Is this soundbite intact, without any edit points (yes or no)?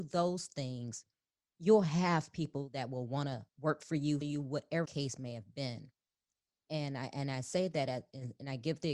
no